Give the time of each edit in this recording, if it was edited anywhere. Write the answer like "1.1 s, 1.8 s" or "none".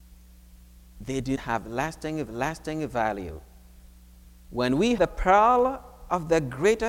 1.4 s, 2.3 s, 5.0 s